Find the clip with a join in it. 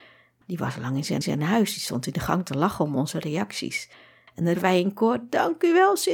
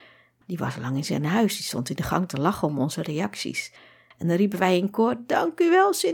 first; 2 cuts; at 1.2 s, 4.5 s

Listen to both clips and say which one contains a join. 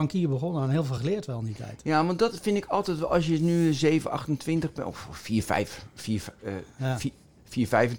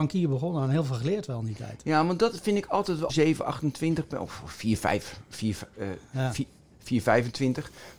second; 1 cut; at 3.1 s

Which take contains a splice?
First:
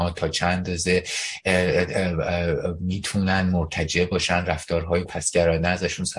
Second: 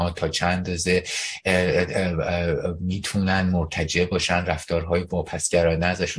first; 1 cut; at 5.1 s

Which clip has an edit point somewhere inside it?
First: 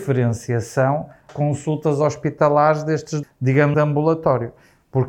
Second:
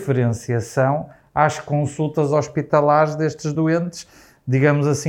first; 3 cuts; at 1.3 s, 3.2 s, 3.7 s

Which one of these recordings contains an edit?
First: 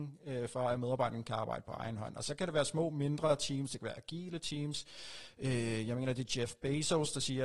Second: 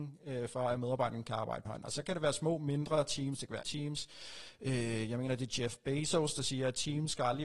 second; 2 cuts; at 1.7 s, 3.6 s

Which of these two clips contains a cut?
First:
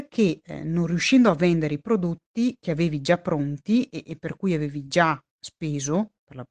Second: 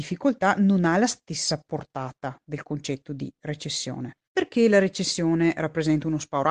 second; 1 cut; at 4.3 s

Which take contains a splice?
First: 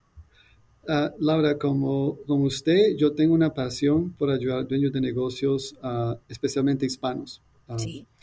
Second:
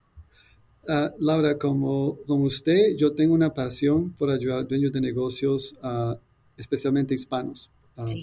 first; 1 cut; at 6.2 s

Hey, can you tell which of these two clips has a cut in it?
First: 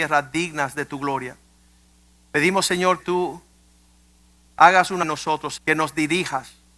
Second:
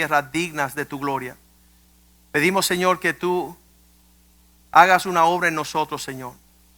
first; 3 cuts; at 3.0 s, 5.0 s, 5.6 s

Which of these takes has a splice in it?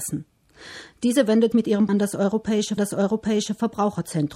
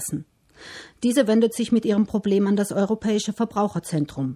first; 3 cuts; at 1.5 s, 1.9 s, 2.8 s

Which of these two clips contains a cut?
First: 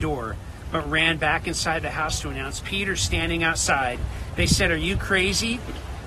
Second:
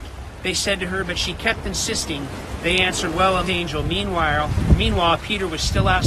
second; 1 cut; at 3.5 s

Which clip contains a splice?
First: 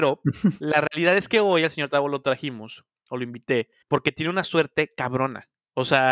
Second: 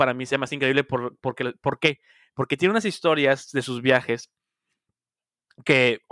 first; 1 cut; at 3.8 s

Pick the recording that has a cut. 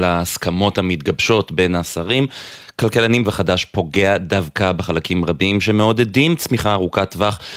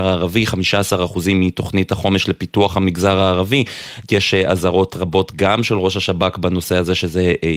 first; 1 cut; at 3.2 s

